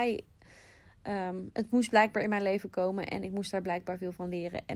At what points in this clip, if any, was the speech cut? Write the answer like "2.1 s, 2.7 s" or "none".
none